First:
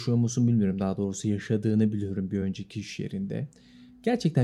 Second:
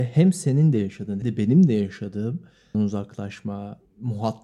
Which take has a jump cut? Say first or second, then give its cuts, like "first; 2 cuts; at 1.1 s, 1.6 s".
second; 2 cuts; at 1.2 s, 2.7 s